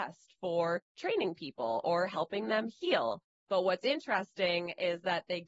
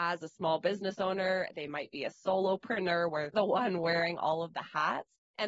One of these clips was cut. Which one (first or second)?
second